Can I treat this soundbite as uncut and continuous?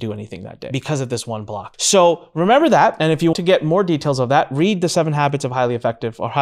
no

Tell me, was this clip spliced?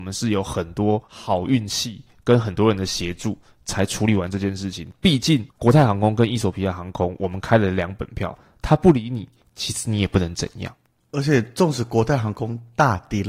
no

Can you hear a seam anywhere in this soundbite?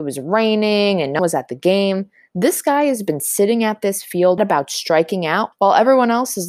yes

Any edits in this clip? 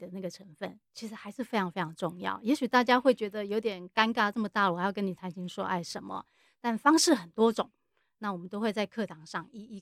no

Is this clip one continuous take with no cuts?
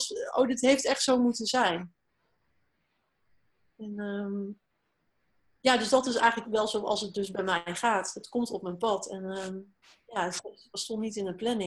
no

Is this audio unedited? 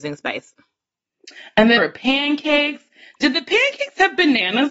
no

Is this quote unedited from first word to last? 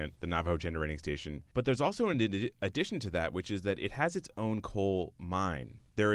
yes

